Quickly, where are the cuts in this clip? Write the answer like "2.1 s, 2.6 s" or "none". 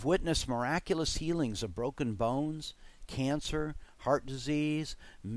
none